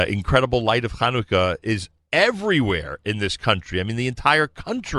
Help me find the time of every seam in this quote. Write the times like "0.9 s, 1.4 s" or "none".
none